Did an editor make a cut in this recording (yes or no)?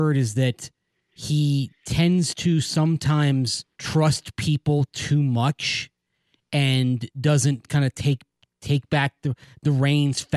yes